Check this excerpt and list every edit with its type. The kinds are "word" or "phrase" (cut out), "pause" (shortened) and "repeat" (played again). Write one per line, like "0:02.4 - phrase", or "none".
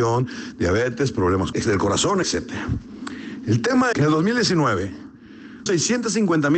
0:01.5 - word
0:02.2 - word
0:03.9 - word
0:05.7 - word